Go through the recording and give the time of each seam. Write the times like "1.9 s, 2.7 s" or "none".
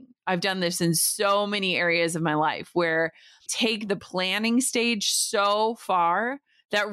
3.5 s